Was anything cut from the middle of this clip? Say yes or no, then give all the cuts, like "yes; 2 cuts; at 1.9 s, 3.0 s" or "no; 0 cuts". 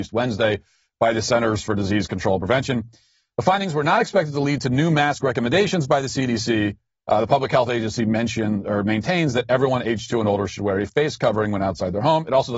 no; 0 cuts